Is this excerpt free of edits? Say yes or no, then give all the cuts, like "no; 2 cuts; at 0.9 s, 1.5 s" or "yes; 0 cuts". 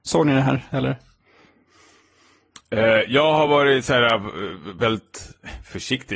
yes; 0 cuts